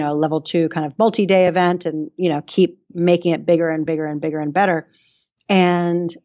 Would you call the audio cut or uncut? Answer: uncut